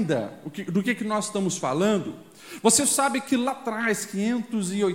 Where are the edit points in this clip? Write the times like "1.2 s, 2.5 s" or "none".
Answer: none